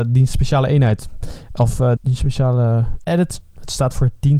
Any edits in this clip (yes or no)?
yes